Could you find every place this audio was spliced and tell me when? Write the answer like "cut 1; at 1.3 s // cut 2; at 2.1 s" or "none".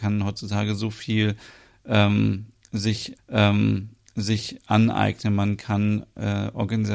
cut 1; at 3.2 s